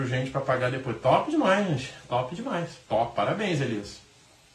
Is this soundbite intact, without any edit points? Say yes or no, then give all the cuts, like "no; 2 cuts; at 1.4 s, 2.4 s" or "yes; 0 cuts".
no; 1 cut; at 2.8 s